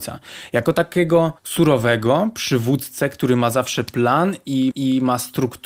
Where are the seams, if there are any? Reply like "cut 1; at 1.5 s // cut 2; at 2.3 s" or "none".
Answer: cut 1; at 1.4 s // cut 2; at 4.7 s